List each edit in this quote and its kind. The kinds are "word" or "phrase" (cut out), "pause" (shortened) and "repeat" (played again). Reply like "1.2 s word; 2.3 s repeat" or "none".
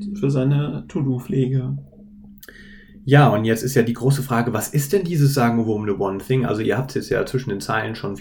none